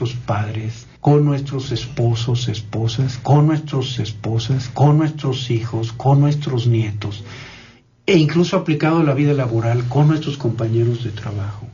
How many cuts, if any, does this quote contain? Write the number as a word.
two